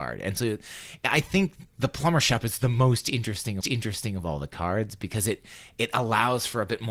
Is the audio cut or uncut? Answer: cut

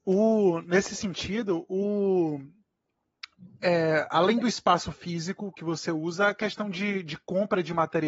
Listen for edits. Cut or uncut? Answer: uncut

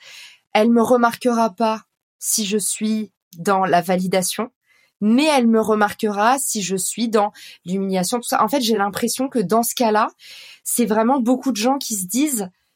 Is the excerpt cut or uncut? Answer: uncut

